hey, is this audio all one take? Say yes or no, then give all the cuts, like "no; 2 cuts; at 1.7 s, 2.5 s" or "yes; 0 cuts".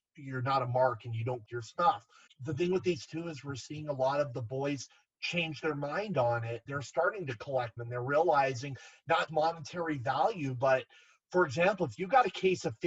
no; 6 cuts; at 1.4 s, 2.3 s, 3.1 s, 6.7 s, 7.8 s, 9.3 s